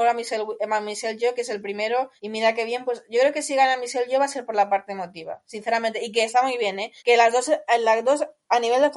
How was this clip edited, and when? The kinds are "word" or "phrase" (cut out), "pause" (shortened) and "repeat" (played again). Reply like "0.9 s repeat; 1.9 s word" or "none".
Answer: 2.2 s pause; 7.0 s pause